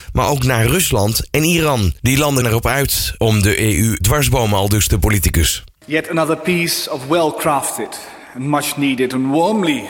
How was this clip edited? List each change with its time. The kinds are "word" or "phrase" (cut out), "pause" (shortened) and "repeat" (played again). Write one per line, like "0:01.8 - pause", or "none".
0:02.4 - word
0:04.0 - word
0:05.7 - pause